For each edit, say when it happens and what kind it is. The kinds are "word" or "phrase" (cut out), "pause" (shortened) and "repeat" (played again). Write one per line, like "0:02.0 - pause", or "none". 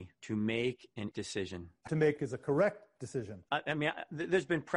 0:01.1 - word
0:01.9 - phrase
0:02.2 - phrase